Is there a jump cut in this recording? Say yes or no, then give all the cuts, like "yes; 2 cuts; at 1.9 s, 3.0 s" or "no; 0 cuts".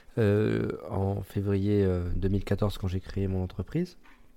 no; 0 cuts